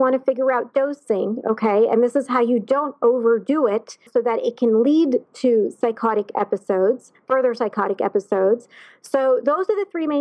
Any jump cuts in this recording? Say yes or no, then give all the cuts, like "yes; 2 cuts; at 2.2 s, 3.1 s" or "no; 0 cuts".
yes; 1 cut; at 4.1 s